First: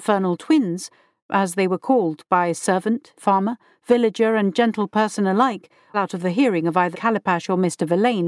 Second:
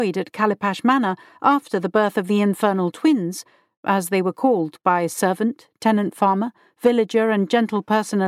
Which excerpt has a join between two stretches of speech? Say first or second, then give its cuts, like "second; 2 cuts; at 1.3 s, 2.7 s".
first; 3 cuts; at 3.2 s, 5.9 s, 6.9 s